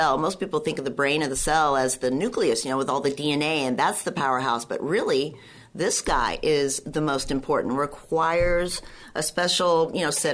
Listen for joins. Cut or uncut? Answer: uncut